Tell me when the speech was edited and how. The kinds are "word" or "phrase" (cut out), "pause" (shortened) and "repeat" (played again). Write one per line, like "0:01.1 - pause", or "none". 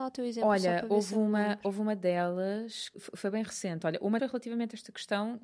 0:02.9 - word
0:04.2 - word